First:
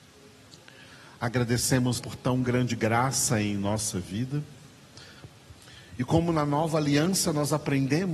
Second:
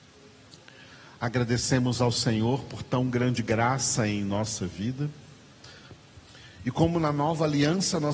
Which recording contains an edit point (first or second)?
first